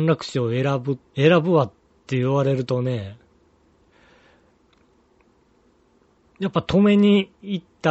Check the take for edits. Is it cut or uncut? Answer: cut